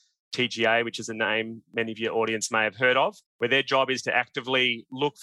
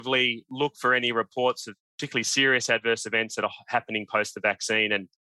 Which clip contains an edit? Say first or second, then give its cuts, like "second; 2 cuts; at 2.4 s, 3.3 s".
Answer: first; 1 cut; at 3.3 s